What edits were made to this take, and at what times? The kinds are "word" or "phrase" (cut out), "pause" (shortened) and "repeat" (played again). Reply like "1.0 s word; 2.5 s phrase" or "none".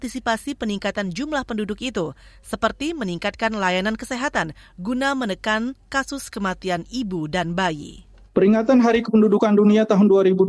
none

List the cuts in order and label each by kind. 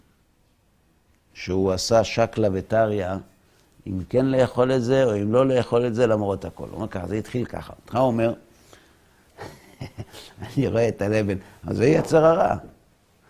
none

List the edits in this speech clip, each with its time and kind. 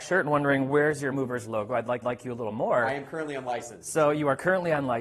1.1 s word; 2.0 s repeat

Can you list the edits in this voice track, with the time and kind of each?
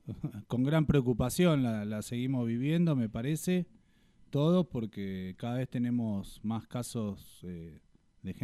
none

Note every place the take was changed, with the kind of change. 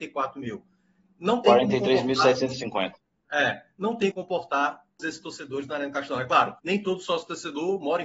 4.1 s word; 5.0 s word; 6.6 s pause

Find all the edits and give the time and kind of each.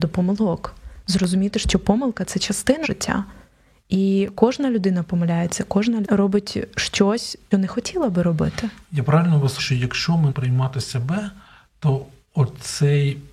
2.8 s word; 6.0 s word; 7.5 s word; 9.6 s word; 10.3 s word

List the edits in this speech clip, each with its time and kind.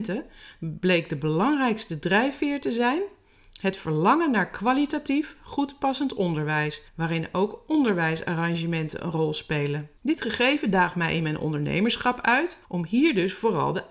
6.9 s pause; 10.0 s pause; 12.6 s pause

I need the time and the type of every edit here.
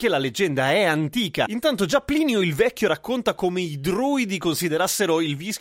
none

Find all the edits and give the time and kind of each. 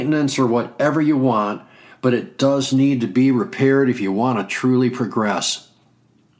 none

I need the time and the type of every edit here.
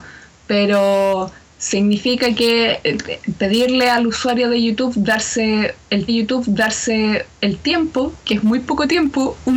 6.1 s repeat

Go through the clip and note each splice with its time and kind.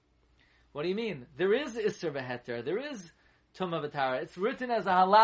none

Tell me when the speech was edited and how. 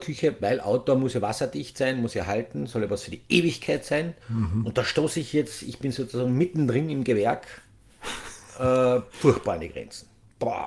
4.2 s pause

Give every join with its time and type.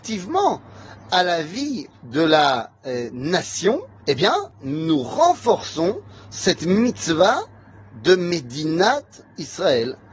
4.0 s pause

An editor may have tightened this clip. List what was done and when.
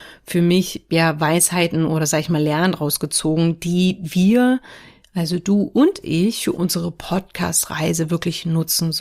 none

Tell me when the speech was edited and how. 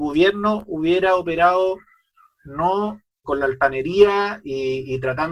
3.2 s word

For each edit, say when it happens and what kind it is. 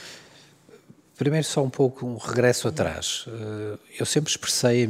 none

